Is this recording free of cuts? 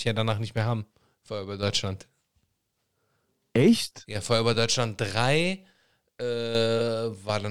yes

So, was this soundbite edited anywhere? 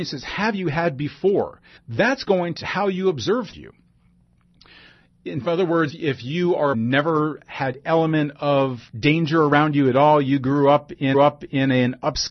yes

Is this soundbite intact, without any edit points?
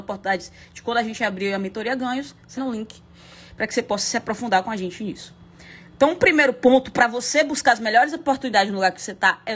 no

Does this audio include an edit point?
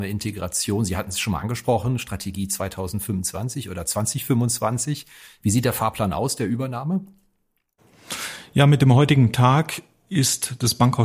no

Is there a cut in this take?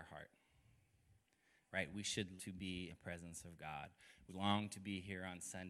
yes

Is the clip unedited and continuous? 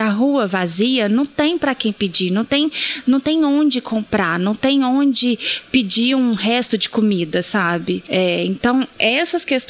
yes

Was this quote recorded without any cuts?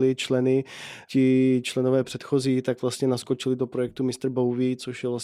yes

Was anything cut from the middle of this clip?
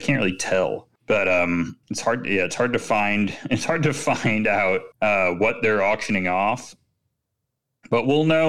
yes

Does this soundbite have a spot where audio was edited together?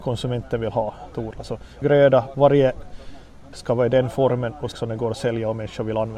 yes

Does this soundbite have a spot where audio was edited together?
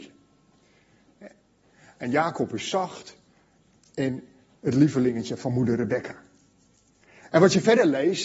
no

